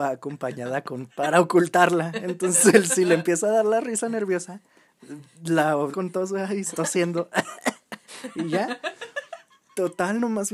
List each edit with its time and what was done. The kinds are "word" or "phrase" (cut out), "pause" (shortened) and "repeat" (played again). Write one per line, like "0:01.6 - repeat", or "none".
0:01.1 - word
0:05.9 - word
0:06.7 - word